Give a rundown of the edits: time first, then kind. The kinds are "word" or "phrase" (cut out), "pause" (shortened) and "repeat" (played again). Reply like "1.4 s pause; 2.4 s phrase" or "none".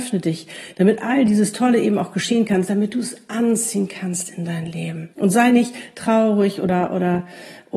5.1 s pause